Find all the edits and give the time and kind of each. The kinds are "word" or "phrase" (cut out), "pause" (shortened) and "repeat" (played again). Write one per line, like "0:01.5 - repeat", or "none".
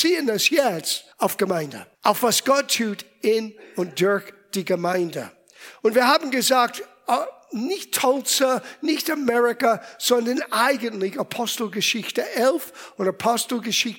0:01.1 - pause
0:01.9 - pause